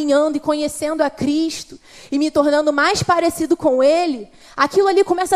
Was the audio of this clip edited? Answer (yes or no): no